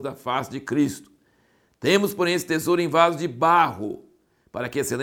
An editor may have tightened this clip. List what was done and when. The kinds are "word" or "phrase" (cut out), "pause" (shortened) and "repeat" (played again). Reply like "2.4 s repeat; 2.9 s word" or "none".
none